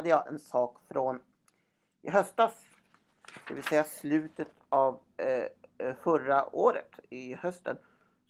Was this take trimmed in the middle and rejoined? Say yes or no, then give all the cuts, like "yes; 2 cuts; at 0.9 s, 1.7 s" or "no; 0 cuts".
no; 0 cuts